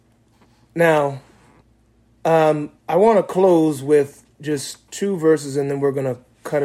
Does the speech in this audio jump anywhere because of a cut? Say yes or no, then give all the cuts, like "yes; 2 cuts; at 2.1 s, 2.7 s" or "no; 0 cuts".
yes; 1 cut; at 2.8 s